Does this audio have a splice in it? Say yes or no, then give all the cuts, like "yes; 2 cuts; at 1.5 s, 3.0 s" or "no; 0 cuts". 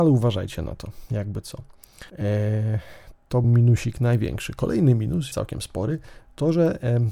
yes; 3 cuts; at 2.1 s, 3.4 s, 5.3 s